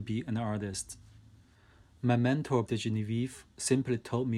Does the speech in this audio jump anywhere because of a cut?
yes; 1 cut; at 2.6 s

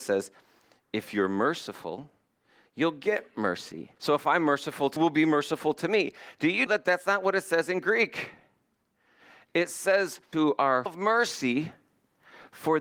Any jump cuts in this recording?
yes; 5 cuts; at 4.0 s, 5.0 s, 6.7 s, 10.3 s, 10.9 s

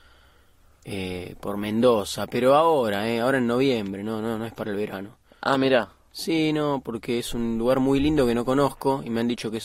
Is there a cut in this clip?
no; 0 cuts

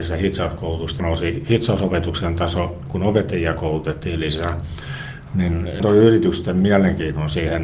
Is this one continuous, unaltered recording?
no; 2 cuts; at 1.0 s, 5.8 s

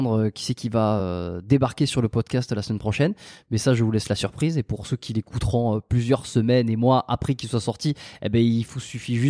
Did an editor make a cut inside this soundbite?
no; 0 cuts

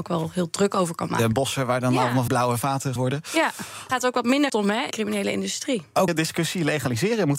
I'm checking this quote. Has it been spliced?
yes; 7 cuts; at 1.3 s, 2.3 s, 3.0 s, 3.9 s, 4.5 s, 4.9 s, 6.1 s

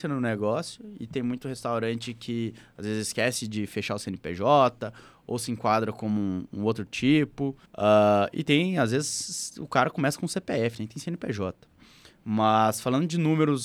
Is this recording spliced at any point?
yes; 1 cut; at 7.7 s

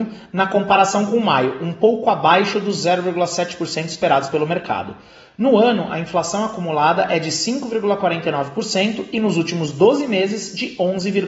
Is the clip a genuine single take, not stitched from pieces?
yes; 0 cuts

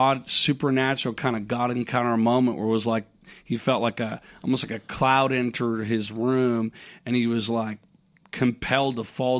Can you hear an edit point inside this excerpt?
no; 0 cuts

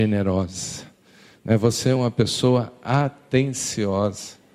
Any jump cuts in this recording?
no; 0 cuts

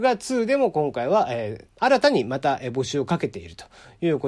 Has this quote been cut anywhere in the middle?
no; 0 cuts

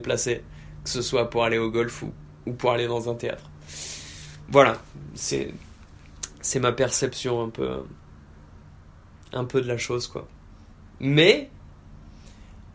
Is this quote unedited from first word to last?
yes; 0 cuts

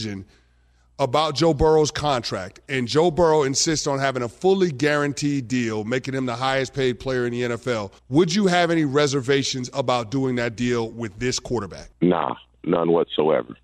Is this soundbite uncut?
no; 2 cuts; at 8.0 s, 11.9 s

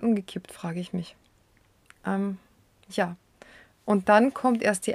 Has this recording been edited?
no; 0 cuts

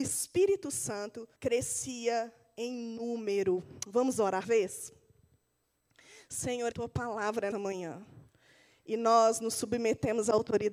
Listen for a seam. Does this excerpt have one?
yes; 4 cuts; at 1.3 s, 4.4 s, 6.7 s, 7.5 s

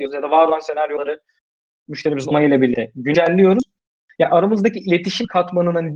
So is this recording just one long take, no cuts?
yes; 0 cuts

